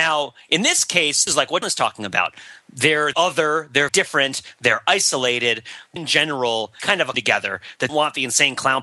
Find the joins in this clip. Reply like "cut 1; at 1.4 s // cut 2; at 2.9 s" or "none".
cut 1; at 1.3 s // cut 2; at 1.6 s // cut 3; at 3.1 s // cut 4; at 3.9 s // cut 5; at 6.0 s // cut 6; at 6.8 s // cut 7; at 7.1 s // cut 8; at 7.9 s